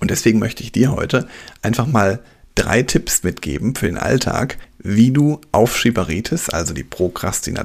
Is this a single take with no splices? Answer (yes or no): yes